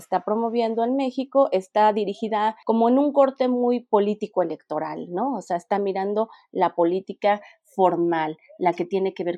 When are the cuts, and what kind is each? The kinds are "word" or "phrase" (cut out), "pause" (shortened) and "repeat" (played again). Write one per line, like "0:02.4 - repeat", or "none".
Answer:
none